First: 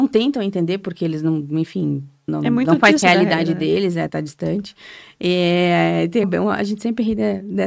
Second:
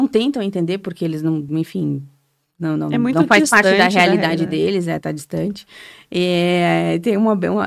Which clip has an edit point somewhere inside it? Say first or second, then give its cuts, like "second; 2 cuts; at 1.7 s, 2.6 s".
first; 3 cuts; at 2.3 s, 3.0 s, 6.2 s